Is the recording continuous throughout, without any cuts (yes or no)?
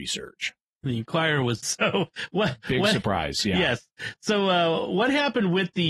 no